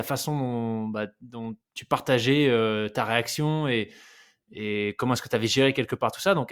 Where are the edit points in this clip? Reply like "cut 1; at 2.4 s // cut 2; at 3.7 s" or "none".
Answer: cut 1; at 1.6 s